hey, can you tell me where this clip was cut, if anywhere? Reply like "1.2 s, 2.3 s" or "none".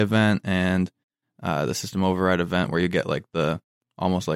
none